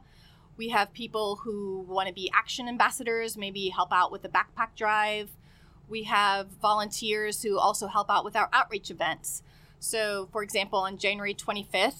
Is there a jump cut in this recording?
no; 0 cuts

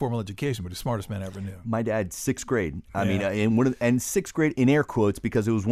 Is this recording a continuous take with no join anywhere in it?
no; 1 cut; at 4.5 s

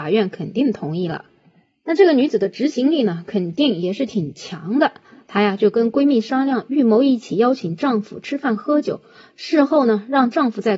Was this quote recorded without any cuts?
yes; 0 cuts

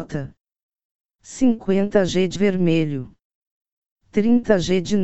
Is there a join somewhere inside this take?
yes; 1 cut; at 2.3 s

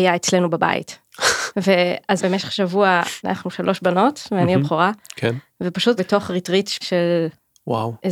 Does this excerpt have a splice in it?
yes; 4 cuts; at 2.2 s, 3.2 s, 6.0 s, 6.8 s

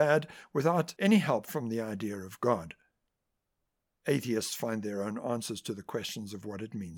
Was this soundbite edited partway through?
no; 0 cuts

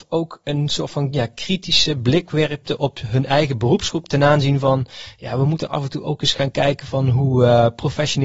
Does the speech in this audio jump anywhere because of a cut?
no; 0 cuts

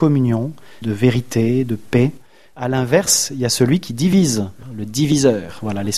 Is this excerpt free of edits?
yes; 0 cuts

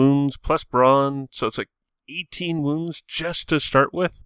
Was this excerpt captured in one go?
yes; 0 cuts

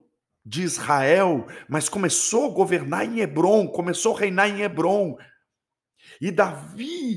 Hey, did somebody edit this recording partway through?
no; 0 cuts

